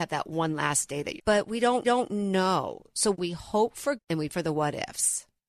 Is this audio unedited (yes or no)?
no